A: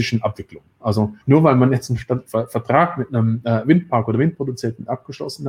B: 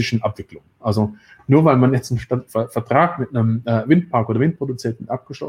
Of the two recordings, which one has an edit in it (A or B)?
A